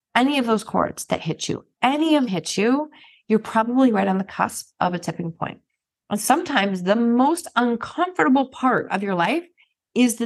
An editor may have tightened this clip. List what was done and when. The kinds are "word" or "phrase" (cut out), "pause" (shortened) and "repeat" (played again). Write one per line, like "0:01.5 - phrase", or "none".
0:02.3 - word